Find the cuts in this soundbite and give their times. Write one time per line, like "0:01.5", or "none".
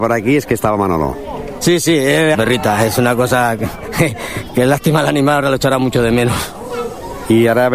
0:02.3